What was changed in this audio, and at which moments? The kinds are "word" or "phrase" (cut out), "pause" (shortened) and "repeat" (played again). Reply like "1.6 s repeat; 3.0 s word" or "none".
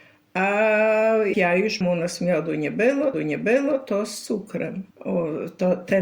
1.3 s word; 1.8 s word; 3.1 s repeat; 4.9 s pause